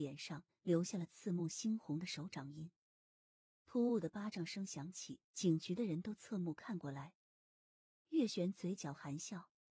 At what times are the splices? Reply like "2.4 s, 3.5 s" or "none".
5.3 s

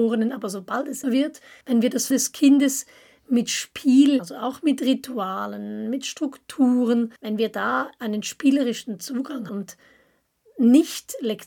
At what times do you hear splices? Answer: 1.0 s, 1.6 s, 2.1 s, 4.2 s, 7.2 s, 9.5 s

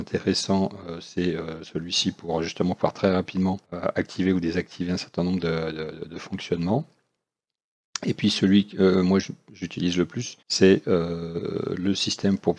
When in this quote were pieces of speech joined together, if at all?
3.6 s, 10.4 s

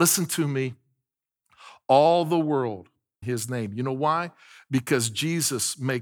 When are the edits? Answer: 3.2 s

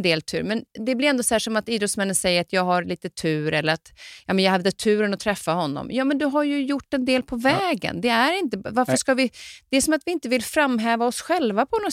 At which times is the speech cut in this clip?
none

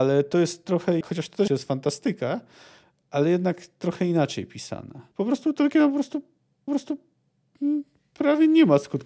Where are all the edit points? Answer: 1.0 s, 1.5 s, 5.1 s, 6.7 s

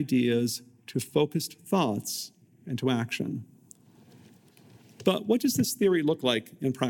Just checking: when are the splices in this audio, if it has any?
none

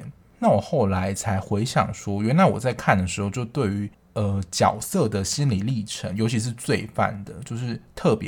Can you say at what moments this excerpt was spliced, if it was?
3.9 s

